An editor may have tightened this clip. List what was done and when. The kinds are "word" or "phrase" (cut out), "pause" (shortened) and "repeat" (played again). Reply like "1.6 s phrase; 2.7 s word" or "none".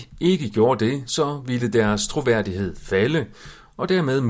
none